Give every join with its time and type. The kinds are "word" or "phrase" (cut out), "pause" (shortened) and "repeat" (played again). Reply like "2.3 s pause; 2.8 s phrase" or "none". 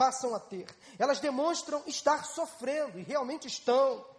none